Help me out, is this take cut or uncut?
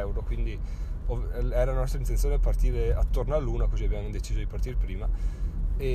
uncut